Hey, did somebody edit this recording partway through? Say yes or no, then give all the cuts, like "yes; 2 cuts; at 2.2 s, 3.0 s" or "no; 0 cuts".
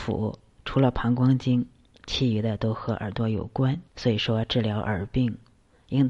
yes; 1 cut; at 3.9 s